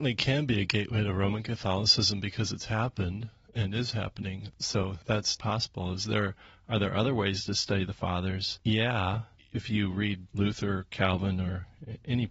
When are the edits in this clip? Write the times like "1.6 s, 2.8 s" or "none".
5.4 s